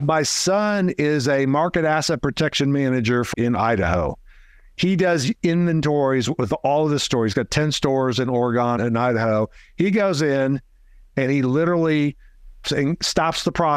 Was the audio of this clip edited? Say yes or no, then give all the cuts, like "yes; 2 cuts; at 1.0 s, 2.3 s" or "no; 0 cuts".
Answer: yes; 3 cuts; at 3.3 s, 8.8 s, 12.6 s